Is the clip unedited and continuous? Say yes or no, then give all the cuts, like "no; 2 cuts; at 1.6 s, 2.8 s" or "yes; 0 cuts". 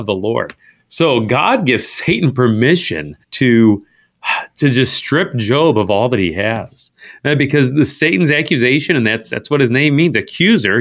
no; 1 cut; at 3.2 s